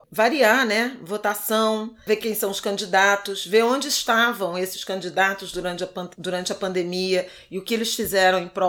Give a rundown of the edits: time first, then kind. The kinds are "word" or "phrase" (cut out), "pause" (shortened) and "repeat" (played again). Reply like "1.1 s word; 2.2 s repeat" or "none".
6.1 s pause